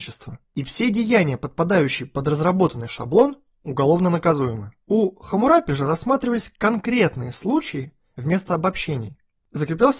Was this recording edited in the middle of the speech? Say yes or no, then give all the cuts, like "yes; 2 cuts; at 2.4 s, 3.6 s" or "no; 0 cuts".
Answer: no; 0 cuts